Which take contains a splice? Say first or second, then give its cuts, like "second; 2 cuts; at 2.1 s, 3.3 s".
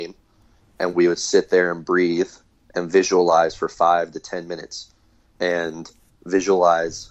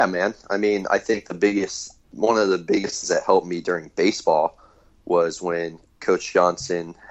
second; 2 cuts; at 2.0 s, 3.0 s